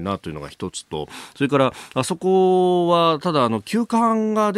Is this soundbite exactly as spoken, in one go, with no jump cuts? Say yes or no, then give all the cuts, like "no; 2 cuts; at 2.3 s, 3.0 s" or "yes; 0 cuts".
yes; 0 cuts